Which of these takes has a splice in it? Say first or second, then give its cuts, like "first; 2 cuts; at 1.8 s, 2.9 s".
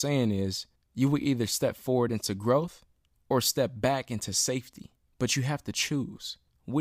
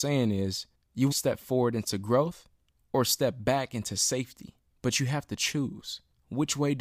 second; 1 cut; at 1.1 s